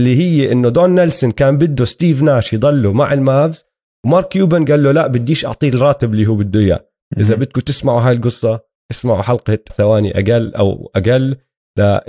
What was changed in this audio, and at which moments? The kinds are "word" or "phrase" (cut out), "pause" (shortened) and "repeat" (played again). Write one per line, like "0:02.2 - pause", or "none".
0:09.7 - word